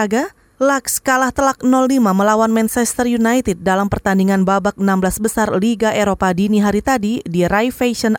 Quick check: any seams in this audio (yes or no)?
no